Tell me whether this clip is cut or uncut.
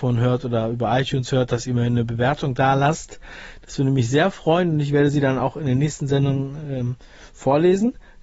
uncut